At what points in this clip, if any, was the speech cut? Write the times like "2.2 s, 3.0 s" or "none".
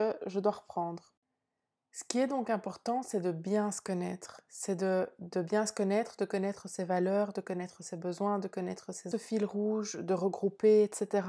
9.1 s